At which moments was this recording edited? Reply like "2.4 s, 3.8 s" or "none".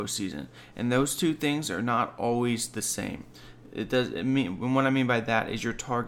none

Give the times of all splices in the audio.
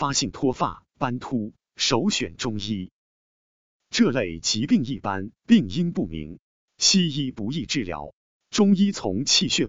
none

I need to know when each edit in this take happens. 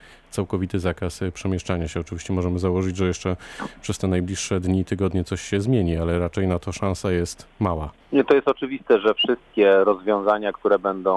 8.0 s

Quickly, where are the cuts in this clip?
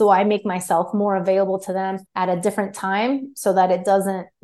2.1 s

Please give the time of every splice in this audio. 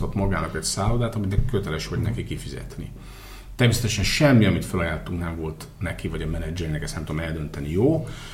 none

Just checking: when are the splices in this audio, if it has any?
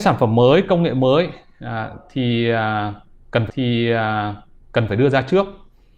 3.5 s

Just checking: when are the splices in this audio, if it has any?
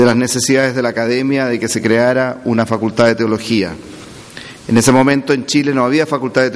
4.6 s

